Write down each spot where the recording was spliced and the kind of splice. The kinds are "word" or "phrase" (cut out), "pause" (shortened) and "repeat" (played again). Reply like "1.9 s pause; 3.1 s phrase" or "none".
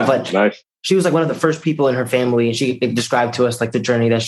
none